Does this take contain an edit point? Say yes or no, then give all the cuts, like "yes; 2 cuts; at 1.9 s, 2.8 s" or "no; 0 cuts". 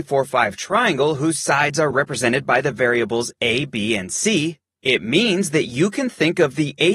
no; 0 cuts